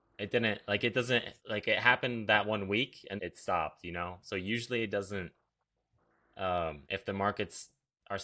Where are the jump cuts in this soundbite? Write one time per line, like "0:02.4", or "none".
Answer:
0:01.4
0:03.2
0:06.8